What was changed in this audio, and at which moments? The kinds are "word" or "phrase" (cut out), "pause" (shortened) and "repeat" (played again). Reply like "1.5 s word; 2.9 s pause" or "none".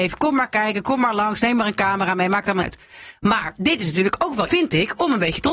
2.6 s word; 4.5 s word